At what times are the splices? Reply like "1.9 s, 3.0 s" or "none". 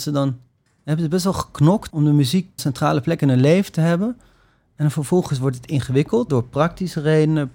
1.9 s, 2.6 s, 6.3 s